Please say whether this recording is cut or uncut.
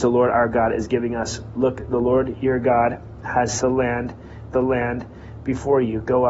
cut